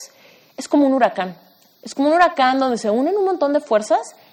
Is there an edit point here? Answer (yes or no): no